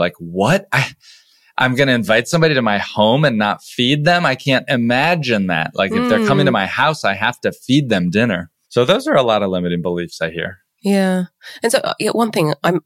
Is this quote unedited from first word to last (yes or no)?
yes